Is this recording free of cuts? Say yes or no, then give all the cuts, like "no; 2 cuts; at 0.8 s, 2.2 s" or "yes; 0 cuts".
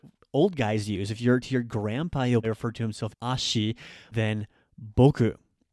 no; 4 cuts; at 1.4 s, 2.4 s, 3.1 s, 4.1 s